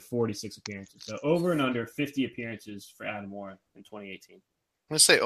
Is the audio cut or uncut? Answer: uncut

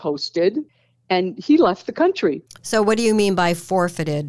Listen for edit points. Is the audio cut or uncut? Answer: uncut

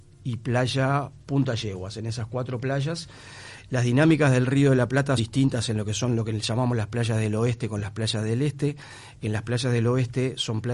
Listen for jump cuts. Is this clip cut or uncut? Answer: cut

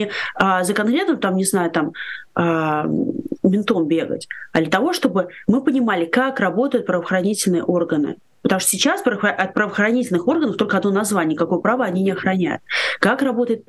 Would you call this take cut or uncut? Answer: uncut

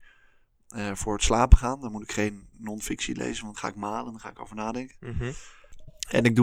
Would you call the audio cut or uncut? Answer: cut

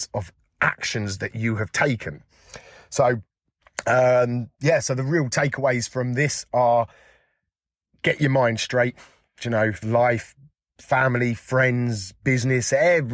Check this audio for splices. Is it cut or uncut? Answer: cut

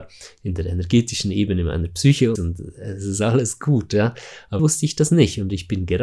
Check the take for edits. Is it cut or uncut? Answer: cut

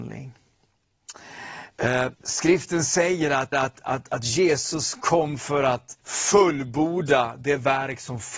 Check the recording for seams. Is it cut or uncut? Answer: cut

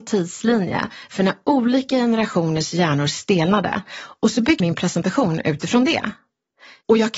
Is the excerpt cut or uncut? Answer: cut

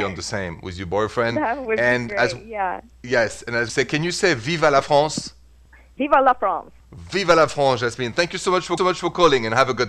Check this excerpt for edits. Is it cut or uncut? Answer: cut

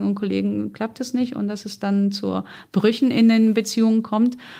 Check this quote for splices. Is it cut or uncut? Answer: uncut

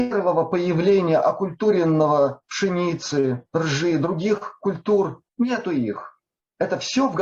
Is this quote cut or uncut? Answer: cut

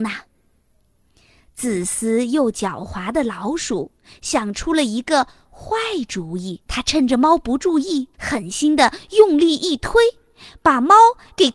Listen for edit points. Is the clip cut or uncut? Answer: cut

